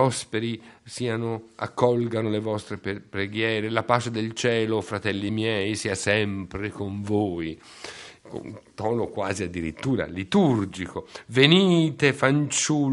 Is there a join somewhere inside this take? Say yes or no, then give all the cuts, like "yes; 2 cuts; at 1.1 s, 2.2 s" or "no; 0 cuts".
no; 0 cuts